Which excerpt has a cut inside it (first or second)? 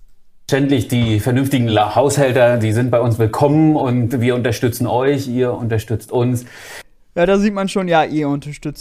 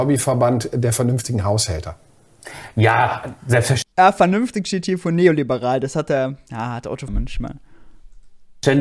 second